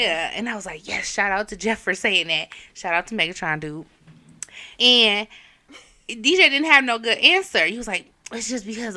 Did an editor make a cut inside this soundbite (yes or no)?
yes